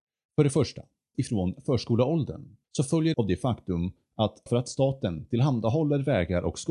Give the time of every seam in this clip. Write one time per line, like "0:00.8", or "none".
0:01.1
0:02.6
0:03.1
0:04.5